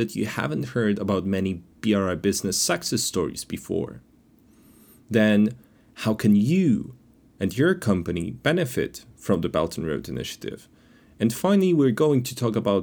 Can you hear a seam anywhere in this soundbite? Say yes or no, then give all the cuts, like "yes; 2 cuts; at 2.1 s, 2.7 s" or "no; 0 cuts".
no; 0 cuts